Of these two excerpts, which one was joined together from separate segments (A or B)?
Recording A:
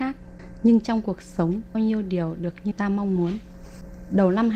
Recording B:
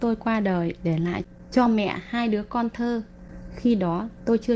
A